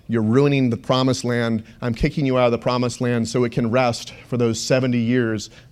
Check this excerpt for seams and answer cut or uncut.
uncut